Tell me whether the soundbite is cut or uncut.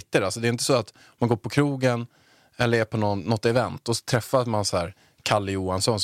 uncut